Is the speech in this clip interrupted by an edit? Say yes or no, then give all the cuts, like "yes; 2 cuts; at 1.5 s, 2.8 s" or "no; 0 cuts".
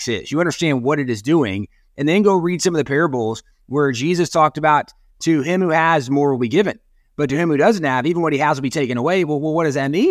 no; 0 cuts